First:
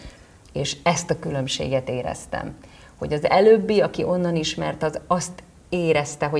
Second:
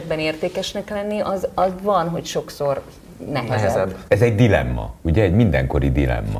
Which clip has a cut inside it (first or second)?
second